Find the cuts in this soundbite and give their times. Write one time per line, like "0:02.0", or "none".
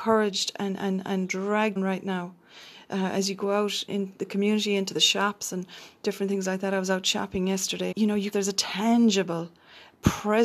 0:01.8
0:03.9
0:07.9
0:08.3